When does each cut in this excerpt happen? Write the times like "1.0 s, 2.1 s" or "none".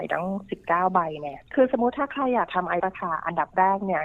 2.8 s